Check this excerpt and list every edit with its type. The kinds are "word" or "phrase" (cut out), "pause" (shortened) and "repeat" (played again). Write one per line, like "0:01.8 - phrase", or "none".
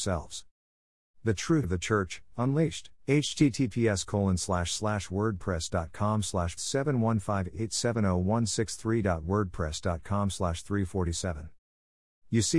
0:01.6 - word
0:03.0 - pause
0:06.6 - phrase